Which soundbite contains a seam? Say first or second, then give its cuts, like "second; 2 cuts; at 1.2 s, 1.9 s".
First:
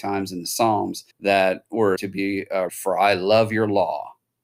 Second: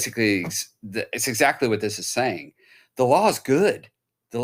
first; 3 cuts; at 1.1 s, 2.0 s, 2.7 s